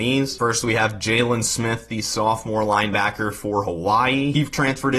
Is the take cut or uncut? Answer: uncut